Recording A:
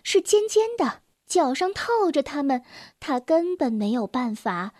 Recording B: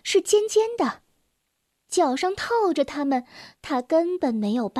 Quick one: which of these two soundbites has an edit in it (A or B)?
A